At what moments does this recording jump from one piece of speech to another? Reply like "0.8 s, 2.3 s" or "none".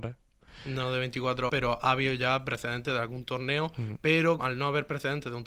1.5 s, 4.4 s